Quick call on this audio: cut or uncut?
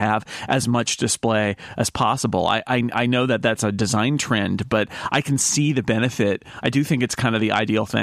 uncut